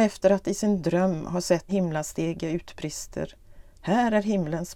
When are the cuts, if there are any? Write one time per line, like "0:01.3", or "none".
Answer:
0:01.7